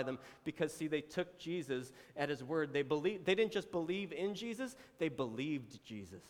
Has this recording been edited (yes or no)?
no